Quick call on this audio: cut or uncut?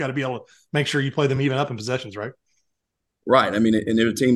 uncut